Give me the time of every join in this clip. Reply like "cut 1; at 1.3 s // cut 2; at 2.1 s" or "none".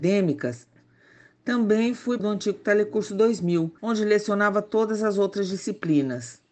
cut 1; at 2.2 s // cut 2; at 3.8 s